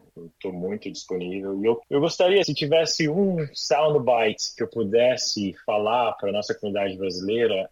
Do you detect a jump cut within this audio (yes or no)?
yes